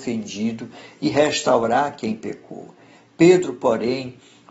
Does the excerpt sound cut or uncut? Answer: uncut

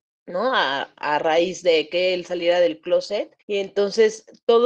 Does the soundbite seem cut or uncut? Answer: cut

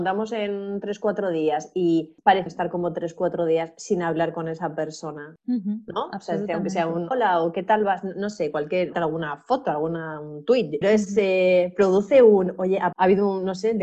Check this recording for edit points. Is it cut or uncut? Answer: cut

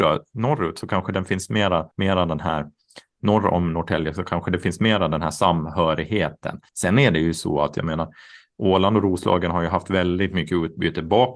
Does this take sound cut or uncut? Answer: cut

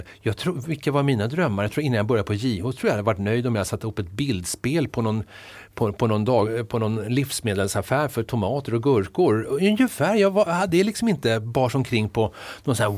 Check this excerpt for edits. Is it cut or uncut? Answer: uncut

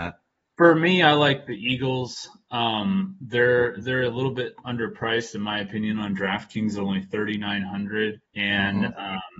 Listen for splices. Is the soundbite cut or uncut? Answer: cut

